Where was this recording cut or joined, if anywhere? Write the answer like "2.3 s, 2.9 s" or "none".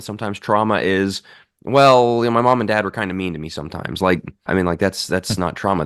4.5 s